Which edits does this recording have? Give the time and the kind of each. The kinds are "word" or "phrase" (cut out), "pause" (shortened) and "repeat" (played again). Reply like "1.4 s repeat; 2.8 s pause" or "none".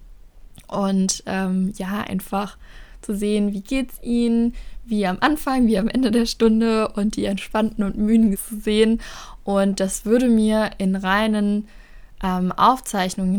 8.3 s phrase